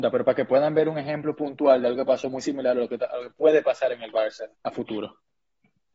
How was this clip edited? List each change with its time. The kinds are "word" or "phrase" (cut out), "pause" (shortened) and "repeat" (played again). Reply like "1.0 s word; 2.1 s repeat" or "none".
4.5 s pause